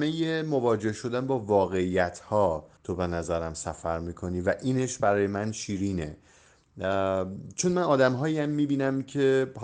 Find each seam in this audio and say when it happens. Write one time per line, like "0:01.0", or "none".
0:02.8